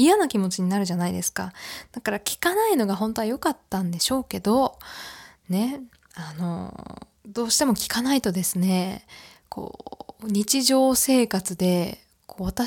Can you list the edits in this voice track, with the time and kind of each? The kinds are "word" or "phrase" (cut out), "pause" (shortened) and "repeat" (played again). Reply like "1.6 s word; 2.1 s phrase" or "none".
none